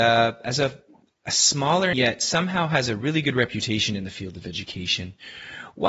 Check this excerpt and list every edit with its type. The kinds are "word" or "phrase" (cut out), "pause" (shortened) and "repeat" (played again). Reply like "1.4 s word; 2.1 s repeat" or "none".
1.9 s word